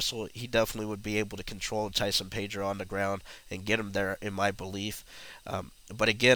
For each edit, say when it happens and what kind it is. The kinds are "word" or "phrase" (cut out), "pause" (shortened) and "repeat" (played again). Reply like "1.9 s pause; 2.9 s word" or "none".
none